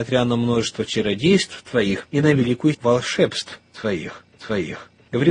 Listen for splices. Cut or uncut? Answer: cut